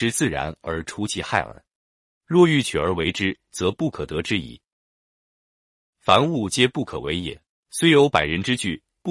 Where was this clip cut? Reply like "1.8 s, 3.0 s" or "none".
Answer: 7.5 s